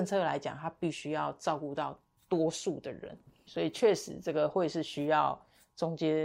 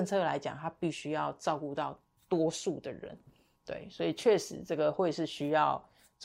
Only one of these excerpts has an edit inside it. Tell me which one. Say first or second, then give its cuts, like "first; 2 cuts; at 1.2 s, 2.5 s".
first; 1 cut; at 3.5 s